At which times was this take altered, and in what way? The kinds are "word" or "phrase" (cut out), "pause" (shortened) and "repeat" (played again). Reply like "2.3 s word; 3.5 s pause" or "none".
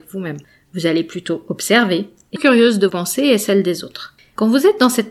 2.4 s word; 2.9 s word